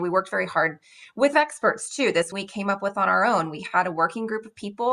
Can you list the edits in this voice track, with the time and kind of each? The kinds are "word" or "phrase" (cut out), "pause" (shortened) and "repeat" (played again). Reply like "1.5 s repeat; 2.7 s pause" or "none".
1.3 s phrase; 2.3 s phrase